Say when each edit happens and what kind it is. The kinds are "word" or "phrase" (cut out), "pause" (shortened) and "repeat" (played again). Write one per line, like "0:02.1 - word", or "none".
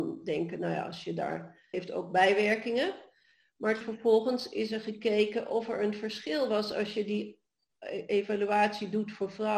0:01.7 - word
0:03.8 - word